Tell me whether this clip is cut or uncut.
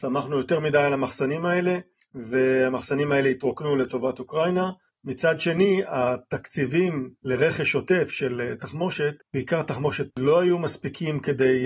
cut